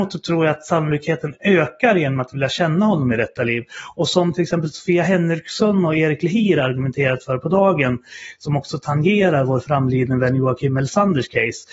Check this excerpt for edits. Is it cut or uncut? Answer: uncut